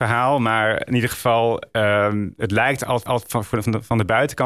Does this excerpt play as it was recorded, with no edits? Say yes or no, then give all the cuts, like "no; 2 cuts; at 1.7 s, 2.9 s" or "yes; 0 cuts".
no; 1 cut; at 3.1 s